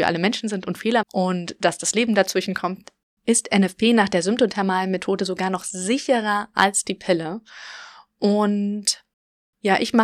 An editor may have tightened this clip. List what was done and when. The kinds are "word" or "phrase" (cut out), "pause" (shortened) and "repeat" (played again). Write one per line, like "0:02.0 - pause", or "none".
0:01.0 - word

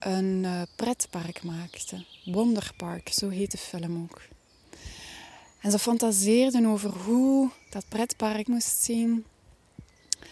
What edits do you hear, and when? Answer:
0:08.5 - word

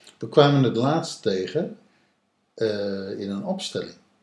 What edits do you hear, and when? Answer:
none

